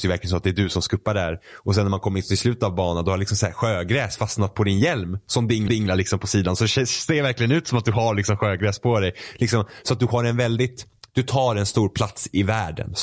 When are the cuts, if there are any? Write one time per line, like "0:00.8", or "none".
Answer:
0:05.7